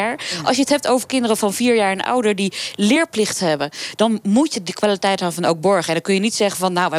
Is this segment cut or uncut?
uncut